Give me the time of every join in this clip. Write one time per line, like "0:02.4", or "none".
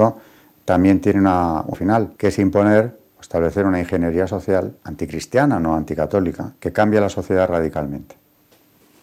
0:01.7
0:02.2
0:04.8
0:06.6